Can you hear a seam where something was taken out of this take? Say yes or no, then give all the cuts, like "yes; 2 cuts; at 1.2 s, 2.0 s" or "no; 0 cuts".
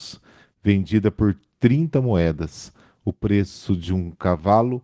no; 0 cuts